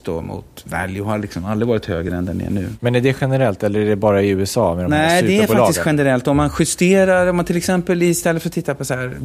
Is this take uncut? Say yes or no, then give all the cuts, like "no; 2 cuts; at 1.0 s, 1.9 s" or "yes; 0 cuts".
yes; 0 cuts